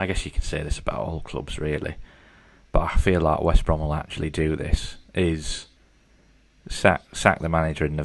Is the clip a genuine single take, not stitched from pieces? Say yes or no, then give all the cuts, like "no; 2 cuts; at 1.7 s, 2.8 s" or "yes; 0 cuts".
yes; 0 cuts